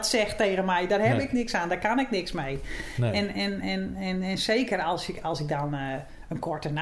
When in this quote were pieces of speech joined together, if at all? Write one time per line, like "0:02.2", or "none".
none